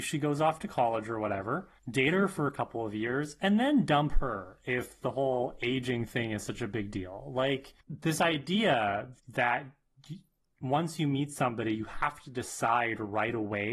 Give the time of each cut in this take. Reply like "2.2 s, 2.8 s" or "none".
1.8 s, 7.8 s, 9.2 s